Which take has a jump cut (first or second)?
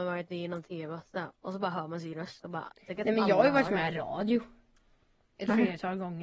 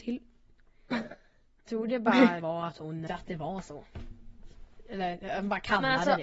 second